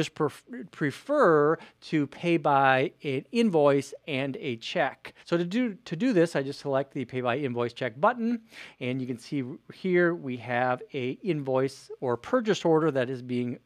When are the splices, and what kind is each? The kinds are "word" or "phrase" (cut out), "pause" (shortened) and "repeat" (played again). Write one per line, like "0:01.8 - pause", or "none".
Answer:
0:05.2 - pause